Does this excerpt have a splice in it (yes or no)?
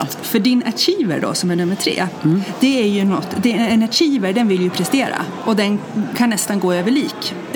no